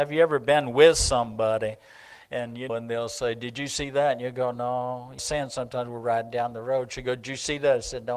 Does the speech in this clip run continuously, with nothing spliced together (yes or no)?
no